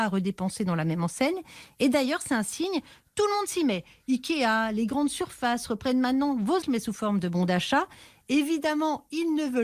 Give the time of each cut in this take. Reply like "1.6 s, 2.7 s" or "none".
6.6 s